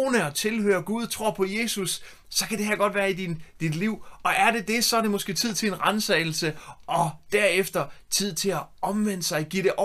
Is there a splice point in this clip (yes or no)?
no